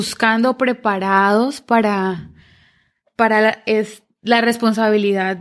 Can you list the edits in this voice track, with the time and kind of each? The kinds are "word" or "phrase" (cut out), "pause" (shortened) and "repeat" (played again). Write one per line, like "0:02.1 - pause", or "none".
none